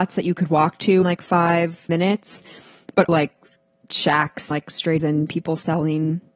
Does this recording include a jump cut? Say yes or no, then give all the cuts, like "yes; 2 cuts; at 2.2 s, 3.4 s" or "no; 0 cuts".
yes; 5 cuts; at 1.0 s, 1.9 s, 3.1 s, 4.5 s, 5.0 s